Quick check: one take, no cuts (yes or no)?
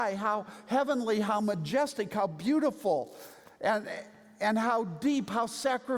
yes